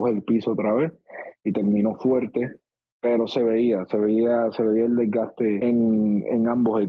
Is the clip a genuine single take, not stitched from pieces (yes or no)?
yes